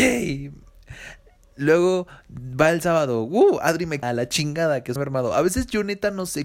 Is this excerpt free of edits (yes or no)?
no